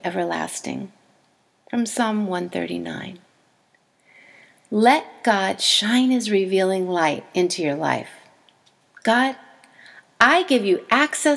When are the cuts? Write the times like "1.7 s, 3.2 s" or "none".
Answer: none